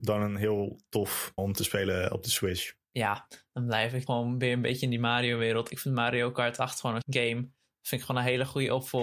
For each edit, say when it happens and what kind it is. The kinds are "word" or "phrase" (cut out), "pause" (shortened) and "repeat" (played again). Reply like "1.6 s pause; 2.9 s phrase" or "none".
1.4 s word; 2.8 s pause; 4.1 s word; 7.0 s word